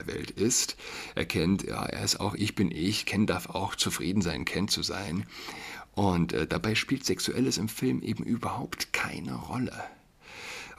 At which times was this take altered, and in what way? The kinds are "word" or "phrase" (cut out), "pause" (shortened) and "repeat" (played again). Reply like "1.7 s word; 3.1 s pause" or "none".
2.4 s word